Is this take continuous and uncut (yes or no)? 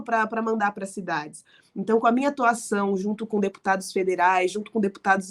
yes